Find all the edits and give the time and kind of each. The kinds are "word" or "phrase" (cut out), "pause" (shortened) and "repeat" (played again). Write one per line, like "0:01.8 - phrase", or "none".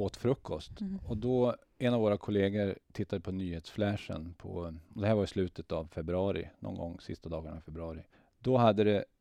0:02.8 - pause
0:08.1 - pause